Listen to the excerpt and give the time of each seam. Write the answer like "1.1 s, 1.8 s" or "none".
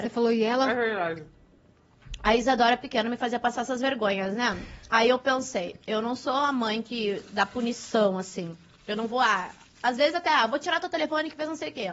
none